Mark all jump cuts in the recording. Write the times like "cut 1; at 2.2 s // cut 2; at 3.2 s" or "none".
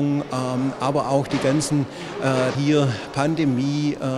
cut 1; at 2.5 s